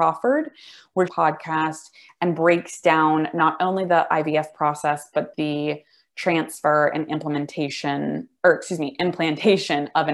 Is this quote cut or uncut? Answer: cut